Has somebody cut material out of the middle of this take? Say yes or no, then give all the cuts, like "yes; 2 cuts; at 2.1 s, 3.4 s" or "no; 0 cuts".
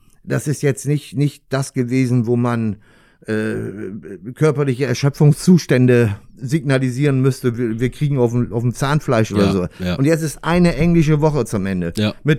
no; 0 cuts